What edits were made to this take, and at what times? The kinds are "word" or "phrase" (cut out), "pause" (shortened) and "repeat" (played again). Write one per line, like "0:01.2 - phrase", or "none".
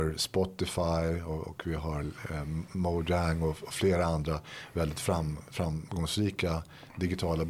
none